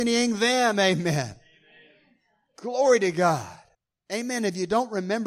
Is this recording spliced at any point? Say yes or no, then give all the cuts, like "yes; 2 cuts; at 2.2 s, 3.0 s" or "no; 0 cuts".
yes; 1 cut; at 3.7 s